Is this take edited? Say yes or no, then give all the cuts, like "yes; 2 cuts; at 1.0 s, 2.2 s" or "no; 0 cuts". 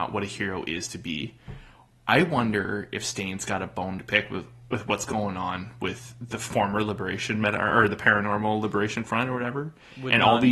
no; 0 cuts